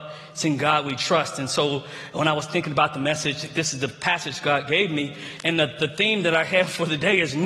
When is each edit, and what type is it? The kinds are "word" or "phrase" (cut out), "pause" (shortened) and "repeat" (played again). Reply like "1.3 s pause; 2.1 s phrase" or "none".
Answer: none